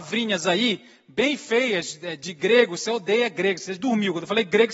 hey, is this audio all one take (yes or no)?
yes